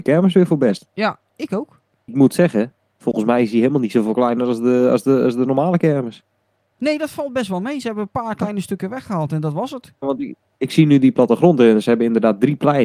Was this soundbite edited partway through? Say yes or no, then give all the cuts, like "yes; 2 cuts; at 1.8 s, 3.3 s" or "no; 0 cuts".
no; 0 cuts